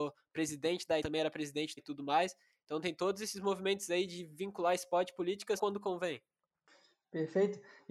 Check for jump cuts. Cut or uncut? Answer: cut